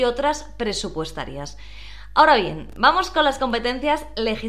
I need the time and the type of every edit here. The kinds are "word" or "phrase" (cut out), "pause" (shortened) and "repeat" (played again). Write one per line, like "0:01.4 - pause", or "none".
none